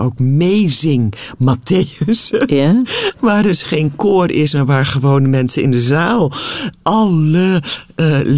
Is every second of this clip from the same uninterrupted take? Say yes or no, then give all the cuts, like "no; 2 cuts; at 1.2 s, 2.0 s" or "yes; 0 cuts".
yes; 0 cuts